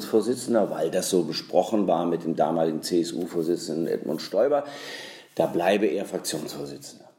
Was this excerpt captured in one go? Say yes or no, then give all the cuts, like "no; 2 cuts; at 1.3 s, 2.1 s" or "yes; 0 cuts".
yes; 0 cuts